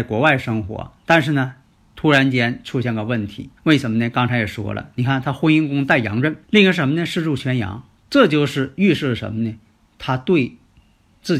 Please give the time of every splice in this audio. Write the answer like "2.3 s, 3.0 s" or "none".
1.6 s, 3.6 s, 6.4 s, 8.0 s